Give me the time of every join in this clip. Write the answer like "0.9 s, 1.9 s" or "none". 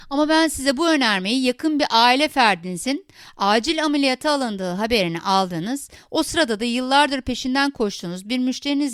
none